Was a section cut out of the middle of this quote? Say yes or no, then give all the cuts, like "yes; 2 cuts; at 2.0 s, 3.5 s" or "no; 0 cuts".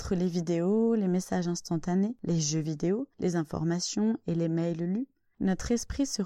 no; 0 cuts